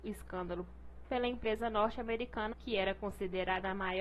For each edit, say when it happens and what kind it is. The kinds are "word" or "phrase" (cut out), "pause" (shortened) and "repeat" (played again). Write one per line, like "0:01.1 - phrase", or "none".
0:01.0 - word
0:02.5 - word